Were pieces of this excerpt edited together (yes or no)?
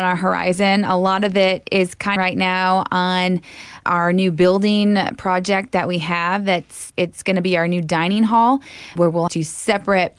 yes